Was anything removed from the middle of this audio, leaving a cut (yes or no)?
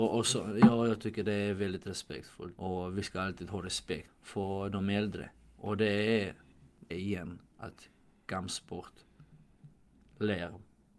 yes